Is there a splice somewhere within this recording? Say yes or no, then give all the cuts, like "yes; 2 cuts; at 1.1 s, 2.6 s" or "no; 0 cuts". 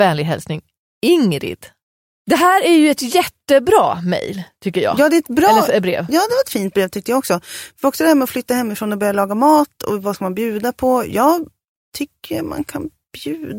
no; 0 cuts